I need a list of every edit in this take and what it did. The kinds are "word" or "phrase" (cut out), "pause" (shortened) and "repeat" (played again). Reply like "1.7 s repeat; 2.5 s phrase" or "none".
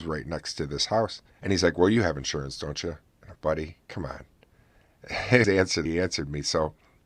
1.3 s pause; 3.4 s word; 5.4 s phrase; 5.9 s word